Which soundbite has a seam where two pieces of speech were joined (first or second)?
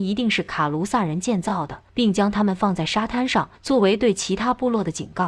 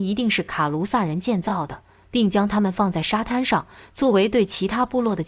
first